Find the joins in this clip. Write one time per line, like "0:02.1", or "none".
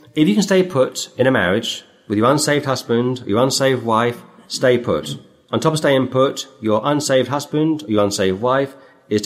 none

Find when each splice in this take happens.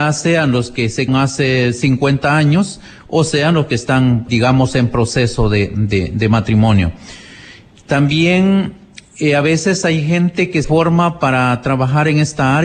0:01.1
0:04.3
0:10.6

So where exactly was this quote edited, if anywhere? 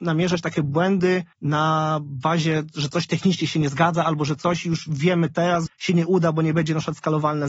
0:01.3
0:05.7

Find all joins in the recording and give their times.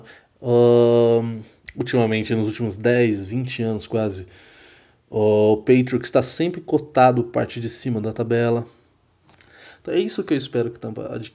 none

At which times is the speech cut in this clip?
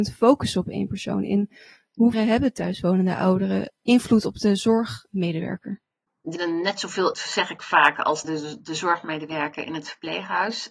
0:02.1
0:06.4
0:07.1
0:08.2

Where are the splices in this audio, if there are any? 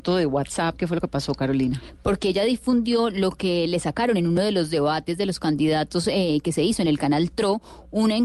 none

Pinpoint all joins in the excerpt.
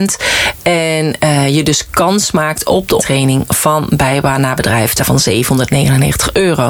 0:03.0
0:05.0

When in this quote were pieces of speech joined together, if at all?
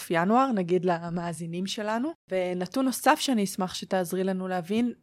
0:02.2

